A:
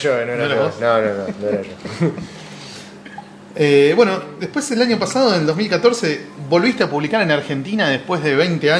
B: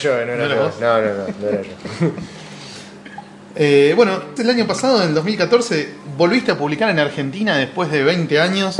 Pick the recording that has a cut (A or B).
B